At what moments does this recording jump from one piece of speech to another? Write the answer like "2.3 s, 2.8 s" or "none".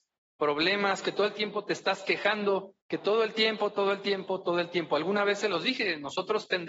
2.8 s